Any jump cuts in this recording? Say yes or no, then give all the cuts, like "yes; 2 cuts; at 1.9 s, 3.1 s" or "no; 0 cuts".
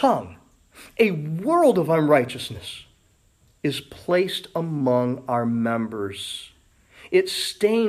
no; 0 cuts